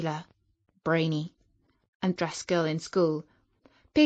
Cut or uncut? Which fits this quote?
cut